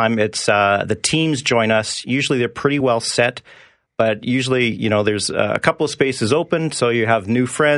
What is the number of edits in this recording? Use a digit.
0